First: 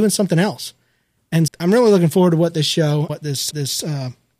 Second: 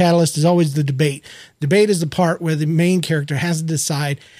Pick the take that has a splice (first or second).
first